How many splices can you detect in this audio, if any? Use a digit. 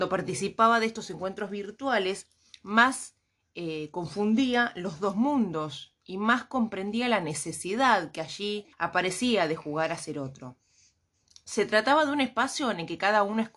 1